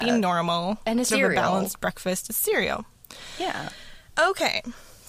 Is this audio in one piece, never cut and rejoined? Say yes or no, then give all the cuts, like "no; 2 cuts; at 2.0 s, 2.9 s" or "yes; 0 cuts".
no; 1 cut; at 1.1 s